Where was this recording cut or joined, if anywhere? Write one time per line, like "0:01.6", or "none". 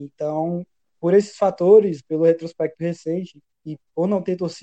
none